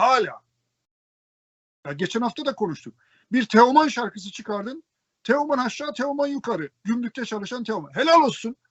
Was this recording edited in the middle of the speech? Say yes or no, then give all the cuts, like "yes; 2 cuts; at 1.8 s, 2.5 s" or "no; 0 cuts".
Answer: no; 0 cuts